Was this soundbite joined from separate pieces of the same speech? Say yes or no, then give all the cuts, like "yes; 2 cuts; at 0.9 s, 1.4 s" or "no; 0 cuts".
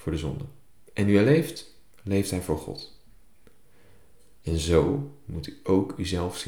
no; 0 cuts